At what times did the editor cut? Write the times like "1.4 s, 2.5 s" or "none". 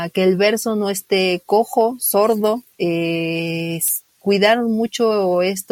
2.7 s, 4.1 s